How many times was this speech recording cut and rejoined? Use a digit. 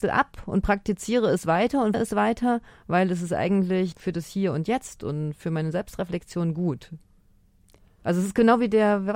2